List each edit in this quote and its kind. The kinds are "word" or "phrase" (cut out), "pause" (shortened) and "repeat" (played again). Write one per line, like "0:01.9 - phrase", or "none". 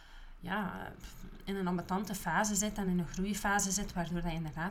none